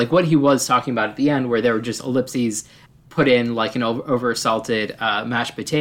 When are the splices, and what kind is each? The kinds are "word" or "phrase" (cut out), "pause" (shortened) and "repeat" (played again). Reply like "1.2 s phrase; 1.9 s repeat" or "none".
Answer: none